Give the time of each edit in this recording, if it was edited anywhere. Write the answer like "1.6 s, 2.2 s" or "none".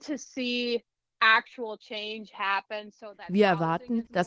none